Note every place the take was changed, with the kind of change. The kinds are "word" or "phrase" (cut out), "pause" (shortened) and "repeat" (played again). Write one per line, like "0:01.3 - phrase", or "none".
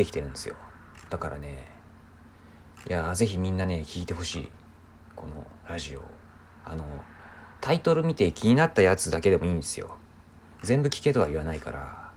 none